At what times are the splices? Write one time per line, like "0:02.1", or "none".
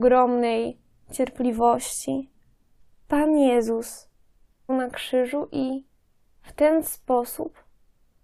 0:04.7